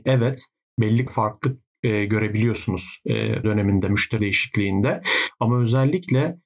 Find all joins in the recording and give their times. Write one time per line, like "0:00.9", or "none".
0:01.1
0:03.4
0:04.2